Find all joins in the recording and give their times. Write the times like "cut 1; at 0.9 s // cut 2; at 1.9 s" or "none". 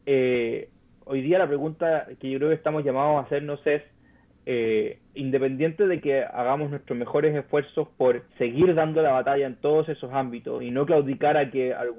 cut 1; at 5.1 s // cut 2; at 8.3 s